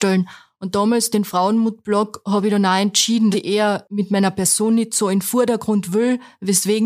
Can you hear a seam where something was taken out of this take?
yes; 2 cuts; at 1.1 s, 3.3 s

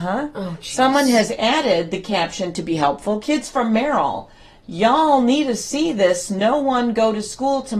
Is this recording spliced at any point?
no; 0 cuts

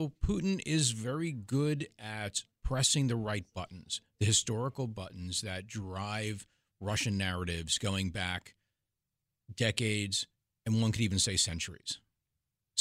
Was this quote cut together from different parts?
no; 0 cuts

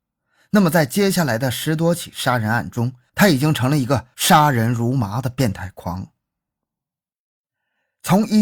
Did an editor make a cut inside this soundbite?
no; 0 cuts

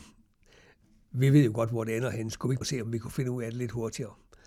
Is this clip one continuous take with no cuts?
no; 1 cut; at 2.6 s

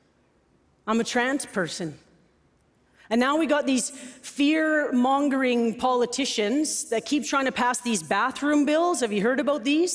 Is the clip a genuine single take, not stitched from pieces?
yes; 0 cuts

